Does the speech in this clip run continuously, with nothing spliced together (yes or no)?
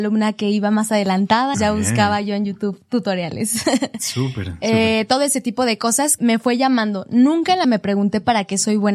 no